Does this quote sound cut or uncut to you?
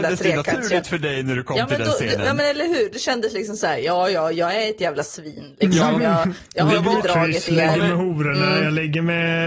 uncut